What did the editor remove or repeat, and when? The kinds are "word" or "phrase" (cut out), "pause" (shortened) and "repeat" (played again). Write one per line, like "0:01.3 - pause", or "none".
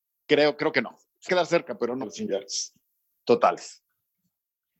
0:01.3 - word
0:02.0 - phrase